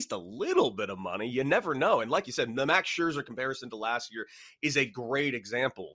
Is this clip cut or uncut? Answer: uncut